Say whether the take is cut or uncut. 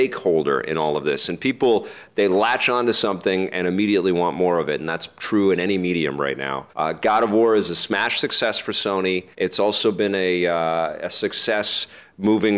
cut